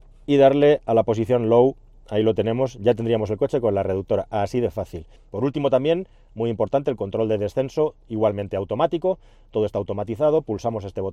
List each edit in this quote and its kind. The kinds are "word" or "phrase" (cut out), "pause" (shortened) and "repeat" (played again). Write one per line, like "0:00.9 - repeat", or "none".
none